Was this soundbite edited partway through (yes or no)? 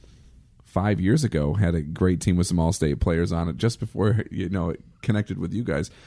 no